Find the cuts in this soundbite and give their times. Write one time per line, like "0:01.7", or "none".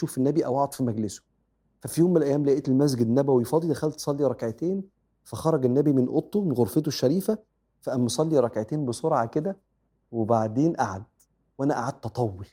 none